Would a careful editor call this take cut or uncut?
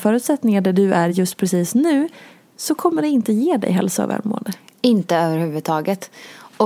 uncut